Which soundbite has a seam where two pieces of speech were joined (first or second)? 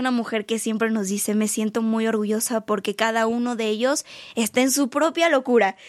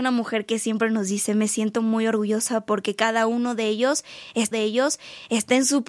second